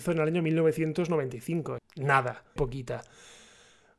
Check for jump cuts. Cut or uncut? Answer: cut